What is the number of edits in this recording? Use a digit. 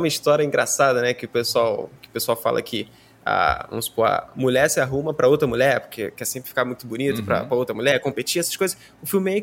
0